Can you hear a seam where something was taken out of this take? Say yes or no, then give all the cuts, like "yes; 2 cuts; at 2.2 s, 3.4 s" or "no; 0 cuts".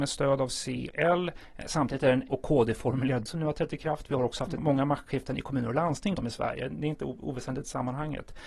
yes; 5 cuts; at 0.9 s, 2.3 s, 3.3 s, 4.6 s, 6.1 s